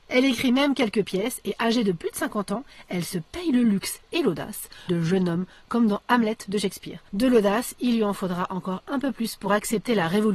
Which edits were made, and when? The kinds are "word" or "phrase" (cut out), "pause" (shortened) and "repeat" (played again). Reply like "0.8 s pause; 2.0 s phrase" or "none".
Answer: 4.9 s phrase